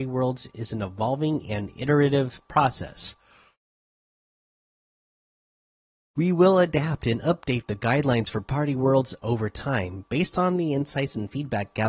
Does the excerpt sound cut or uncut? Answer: uncut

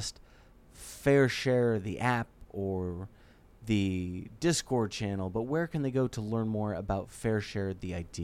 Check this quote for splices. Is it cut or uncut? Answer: uncut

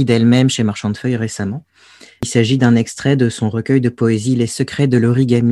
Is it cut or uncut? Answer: uncut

